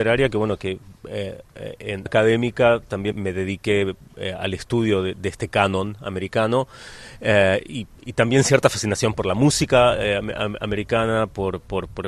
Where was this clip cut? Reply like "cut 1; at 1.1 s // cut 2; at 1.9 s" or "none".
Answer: cut 1; at 2.1 s // cut 2; at 3.1 s